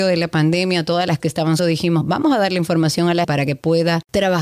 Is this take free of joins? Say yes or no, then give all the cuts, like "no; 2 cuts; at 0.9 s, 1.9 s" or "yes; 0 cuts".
no; 4 cuts; at 1.2 s, 1.6 s, 2.0 s, 3.2 s